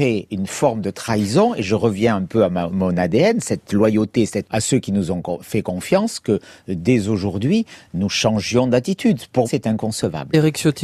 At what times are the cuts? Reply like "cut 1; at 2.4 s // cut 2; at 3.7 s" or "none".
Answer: cut 1; at 4.4 s // cut 2; at 9.4 s